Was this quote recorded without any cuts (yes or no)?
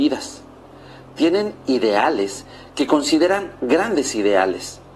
yes